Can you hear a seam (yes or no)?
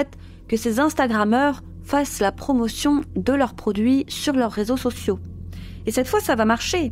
no